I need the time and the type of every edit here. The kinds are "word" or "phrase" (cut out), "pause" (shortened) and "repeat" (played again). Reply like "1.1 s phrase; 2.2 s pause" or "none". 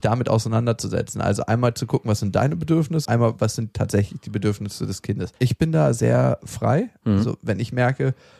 3.0 s word; 5.4 s pause

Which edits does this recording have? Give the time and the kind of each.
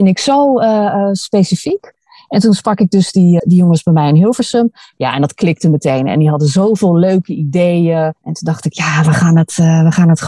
3.4 s word; 8.2 s pause

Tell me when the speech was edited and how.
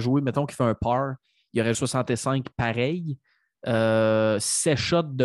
1.7 s word

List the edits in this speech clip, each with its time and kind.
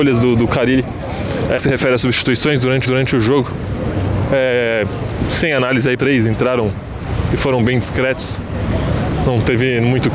1.6 s word; 2.9 s repeat; 6.0 s phrase

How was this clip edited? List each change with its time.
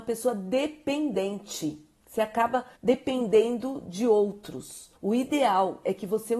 2.8 s pause; 5.0 s pause

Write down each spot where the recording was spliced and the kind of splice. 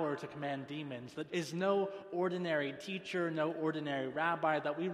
1.3 s word

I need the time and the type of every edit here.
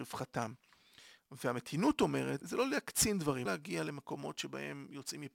2.4 s word; 3.5 s word

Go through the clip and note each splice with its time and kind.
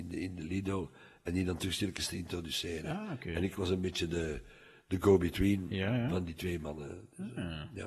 none

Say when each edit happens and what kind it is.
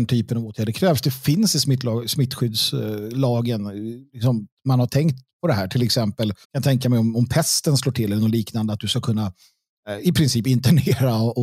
4.1 s pause; 6.4 s pause

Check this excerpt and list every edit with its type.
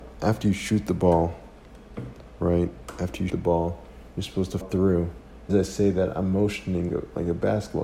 3.3 s word; 4.6 s word; 5.5 s word; 6.9 s word

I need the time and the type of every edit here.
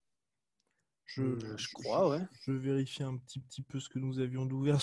3.4 s repeat

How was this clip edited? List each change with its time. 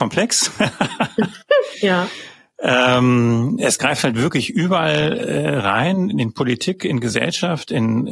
none

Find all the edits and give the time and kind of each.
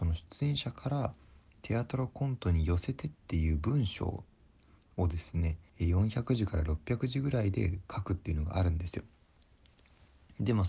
5.7 s pause

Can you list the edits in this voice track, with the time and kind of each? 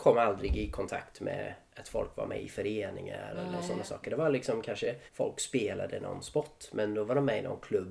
5.1 s pause

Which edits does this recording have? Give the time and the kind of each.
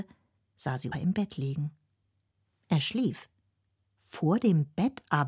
0.9 s word

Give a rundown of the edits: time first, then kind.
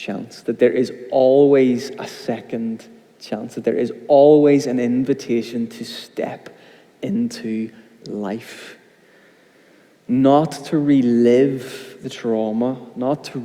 none

